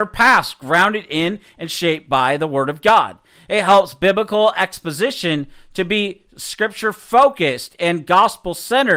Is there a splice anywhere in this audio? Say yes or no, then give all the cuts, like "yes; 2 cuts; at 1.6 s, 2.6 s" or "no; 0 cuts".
no; 0 cuts